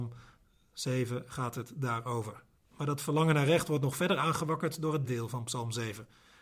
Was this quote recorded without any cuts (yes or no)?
no